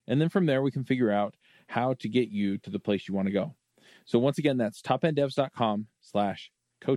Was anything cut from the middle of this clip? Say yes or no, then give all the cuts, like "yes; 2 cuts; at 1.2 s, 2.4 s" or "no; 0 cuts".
no; 0 cuts